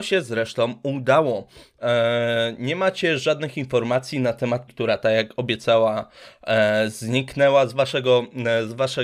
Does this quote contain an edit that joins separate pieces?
yes; 1 cut; at 4.7 s

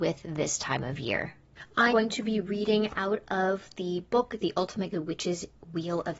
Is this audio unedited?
no; 2 cuts; at 1.9 s, 4.9 s

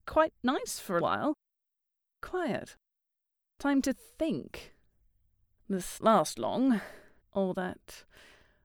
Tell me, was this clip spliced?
yes; 2 cuts; at 1.0 s, 6.0 s

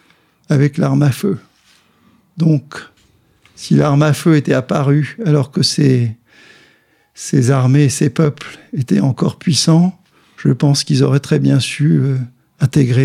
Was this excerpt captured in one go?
yes; 0 cuts

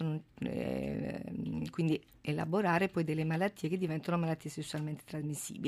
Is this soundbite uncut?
yes; 0 cuts

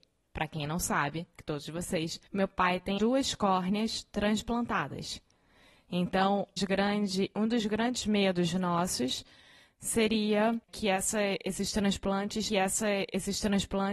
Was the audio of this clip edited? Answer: yes; 6 cuts; at 1.4 s, 2.3 s, 3.0 s, 6.6 s, 10.6 s, 12.5 s

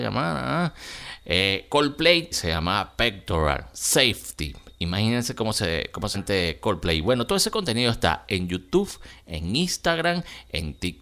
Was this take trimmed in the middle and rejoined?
yes; 2 cuts; at 2.3 s, 6.1 s

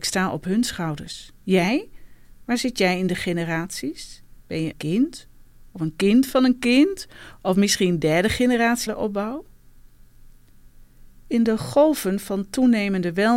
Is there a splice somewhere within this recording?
yes; 4 cuts; at 1.4 s, 4.4 s, 4.7 s, 8.9 s

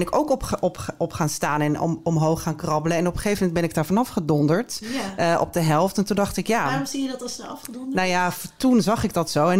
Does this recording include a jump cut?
no; 0 cuts

